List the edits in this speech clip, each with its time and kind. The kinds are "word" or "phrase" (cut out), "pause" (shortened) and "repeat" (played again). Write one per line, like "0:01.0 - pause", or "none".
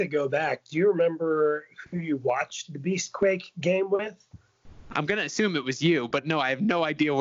none

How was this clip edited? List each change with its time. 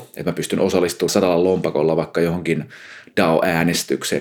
0:01.1 - word

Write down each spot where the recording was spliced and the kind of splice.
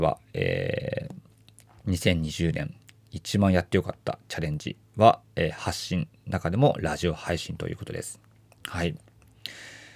none

